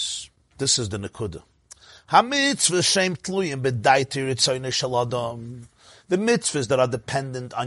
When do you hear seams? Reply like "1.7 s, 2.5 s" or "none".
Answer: none